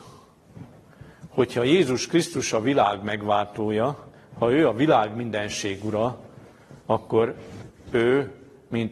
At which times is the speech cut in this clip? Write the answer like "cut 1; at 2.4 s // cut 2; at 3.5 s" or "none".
cut 1; at 6.8 s